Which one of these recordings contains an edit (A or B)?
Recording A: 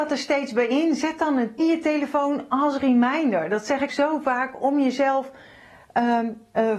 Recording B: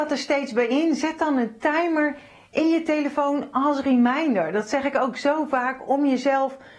A